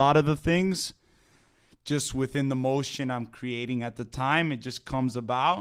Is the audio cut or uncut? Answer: uncut